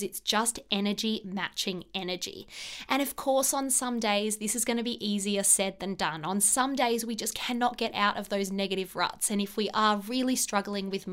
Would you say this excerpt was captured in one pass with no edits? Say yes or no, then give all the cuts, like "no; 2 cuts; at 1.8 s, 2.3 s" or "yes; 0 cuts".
yes; 0 cuts